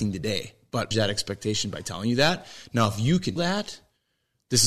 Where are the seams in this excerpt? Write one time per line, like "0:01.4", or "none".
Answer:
0:00.9
0:03.4